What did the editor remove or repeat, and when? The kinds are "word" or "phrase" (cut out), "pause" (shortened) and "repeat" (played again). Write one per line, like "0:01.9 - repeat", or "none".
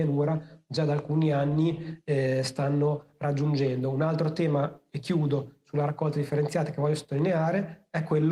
none